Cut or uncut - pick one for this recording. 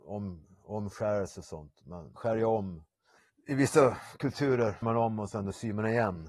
cut